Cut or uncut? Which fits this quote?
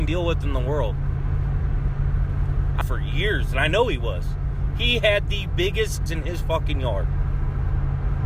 cut